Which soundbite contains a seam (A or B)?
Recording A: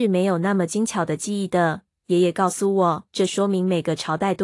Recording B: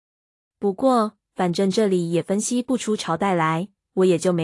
A